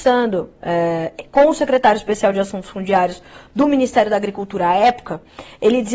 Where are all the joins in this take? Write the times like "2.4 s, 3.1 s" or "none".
none